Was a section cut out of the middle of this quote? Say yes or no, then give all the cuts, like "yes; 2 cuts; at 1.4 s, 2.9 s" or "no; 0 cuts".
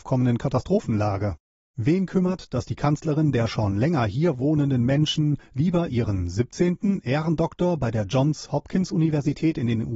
no; 0 cuts